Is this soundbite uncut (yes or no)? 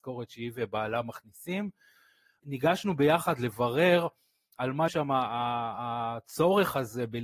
no